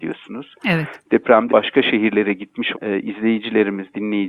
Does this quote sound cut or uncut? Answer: cut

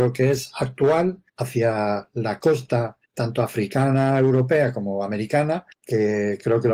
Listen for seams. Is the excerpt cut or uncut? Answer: cut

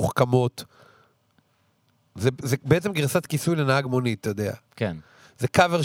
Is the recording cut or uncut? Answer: uncut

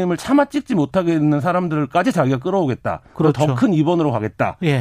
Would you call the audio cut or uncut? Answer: uncut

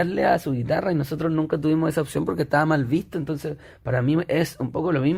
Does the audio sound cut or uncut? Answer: uncut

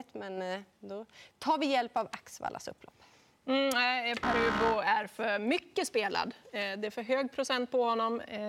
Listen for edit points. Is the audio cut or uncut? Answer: uncut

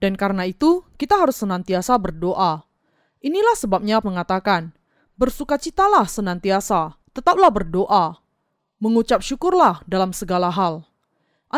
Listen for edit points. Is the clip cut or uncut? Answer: cut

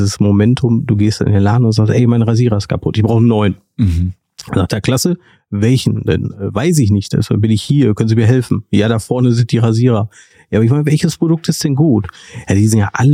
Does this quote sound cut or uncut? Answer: uncut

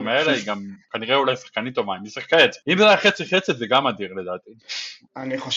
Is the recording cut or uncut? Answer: uncut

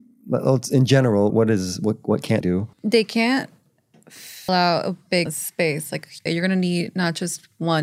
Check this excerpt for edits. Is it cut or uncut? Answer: cut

